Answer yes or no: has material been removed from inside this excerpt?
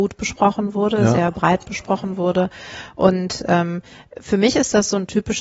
no